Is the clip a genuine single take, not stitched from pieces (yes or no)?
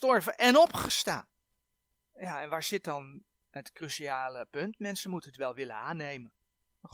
yes